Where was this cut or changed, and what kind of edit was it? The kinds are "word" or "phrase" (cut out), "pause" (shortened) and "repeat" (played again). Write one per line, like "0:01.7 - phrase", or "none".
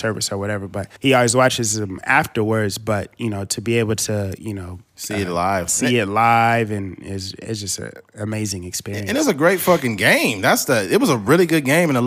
0:01.0 - pause